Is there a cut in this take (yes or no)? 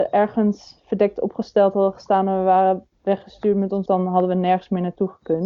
yes